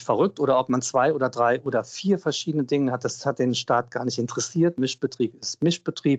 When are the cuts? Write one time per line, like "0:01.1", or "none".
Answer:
none